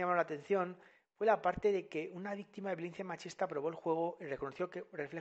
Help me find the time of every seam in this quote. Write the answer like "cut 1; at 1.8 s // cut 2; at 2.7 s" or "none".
none